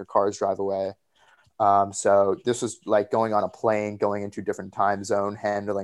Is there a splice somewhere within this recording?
no; 0 cuts

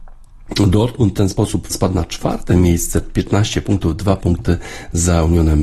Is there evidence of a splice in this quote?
yes; 1 cut; at 1.7 s

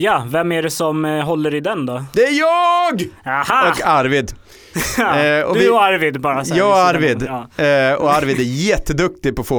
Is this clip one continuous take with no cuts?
yes; 0 cuts

